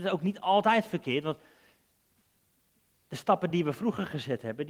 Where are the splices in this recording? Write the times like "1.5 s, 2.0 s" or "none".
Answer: none